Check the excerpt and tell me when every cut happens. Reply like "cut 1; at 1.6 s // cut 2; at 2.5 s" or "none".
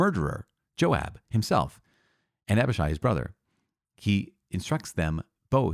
none